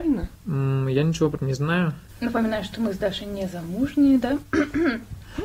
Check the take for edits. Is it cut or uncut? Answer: cut